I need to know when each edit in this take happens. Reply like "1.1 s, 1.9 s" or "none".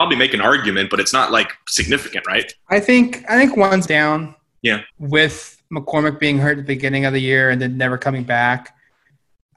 3.9 s, 4.9 s